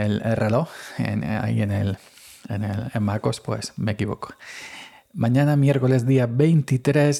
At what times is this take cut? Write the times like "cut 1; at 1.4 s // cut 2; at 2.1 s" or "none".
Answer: none